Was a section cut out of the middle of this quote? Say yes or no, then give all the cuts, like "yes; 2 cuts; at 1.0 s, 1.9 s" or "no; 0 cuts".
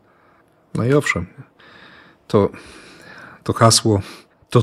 no; 0 cuts